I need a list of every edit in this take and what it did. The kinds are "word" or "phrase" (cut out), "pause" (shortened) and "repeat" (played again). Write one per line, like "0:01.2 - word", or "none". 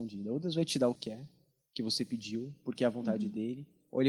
0:01.0 - phrase

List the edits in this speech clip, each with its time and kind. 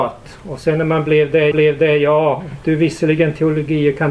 0:01.5 - repeat

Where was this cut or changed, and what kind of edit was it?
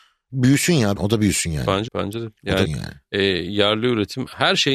0:01.0 - word
0:01.9 - word
0:02.6 - word

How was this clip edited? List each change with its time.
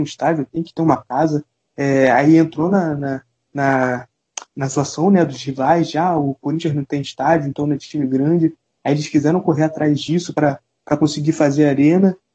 none

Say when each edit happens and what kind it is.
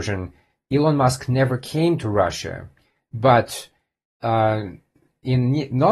none

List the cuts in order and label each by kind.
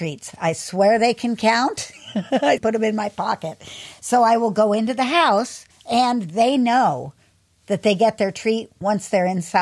0:02.6 - phrase
0:05.7 - pause

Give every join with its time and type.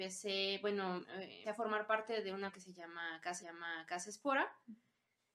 0:01.4 - word
0:02.5 - word
0:03.4 - repeat

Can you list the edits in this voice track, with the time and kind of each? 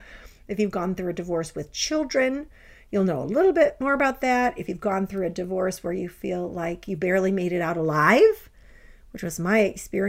none

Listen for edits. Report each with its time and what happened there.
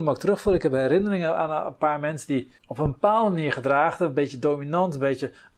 0:02.6 - pause

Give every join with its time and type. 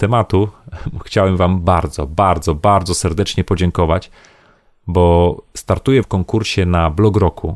0:06.0 - word

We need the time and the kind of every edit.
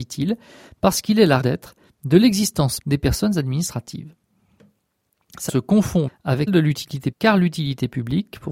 0:01.4 - word
0:02.8 - word
0:05.5 - word
0:06.1 - word
0:06.5 - word
0:07.1 - word

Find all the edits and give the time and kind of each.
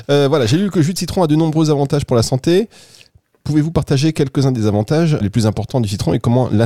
0:05.2 - word

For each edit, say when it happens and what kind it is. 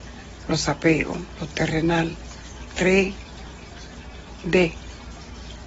0:02.7 - word

